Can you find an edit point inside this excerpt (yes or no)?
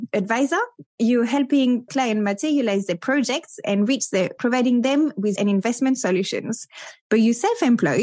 yes